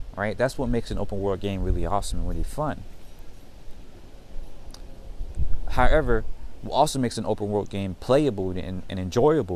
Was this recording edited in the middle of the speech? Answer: no; 0 cuts

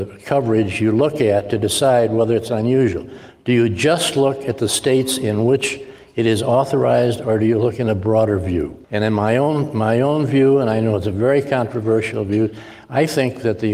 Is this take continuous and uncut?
no; 1 cut; at 8.8 s

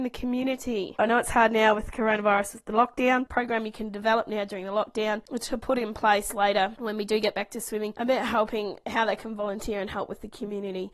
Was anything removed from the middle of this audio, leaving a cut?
no; 0 cuts

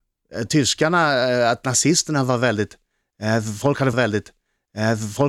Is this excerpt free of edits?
no; 1 cut; at 3.9 s

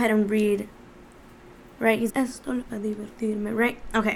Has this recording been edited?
yes; 2 cuts; at 2.1 s, 2.6 s

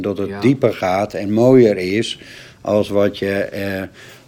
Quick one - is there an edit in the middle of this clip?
no; 0 cuts

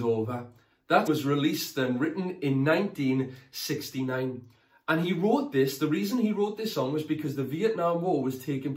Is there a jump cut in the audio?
yes; 1 cut; at 1.1 s

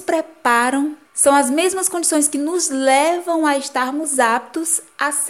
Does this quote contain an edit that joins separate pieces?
yes; 1 cut; at 1.1 s

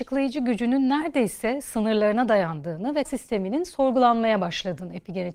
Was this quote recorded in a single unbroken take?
no; 1 cut; at 3.0 s

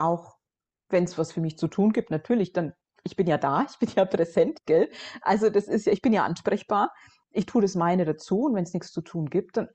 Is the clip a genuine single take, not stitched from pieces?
yes; 0 cuts

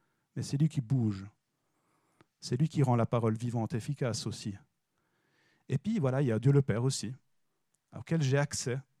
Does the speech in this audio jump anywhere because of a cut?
no; 0 cuts

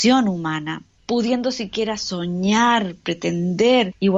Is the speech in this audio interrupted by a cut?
no; 0 cuts

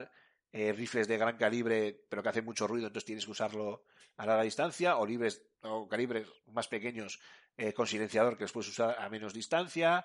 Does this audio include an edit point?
no; 0 cuts

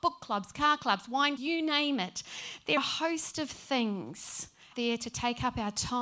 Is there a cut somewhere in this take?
yes; 3 cuts; at 1.4 s, 2.8 s, 4.7 s

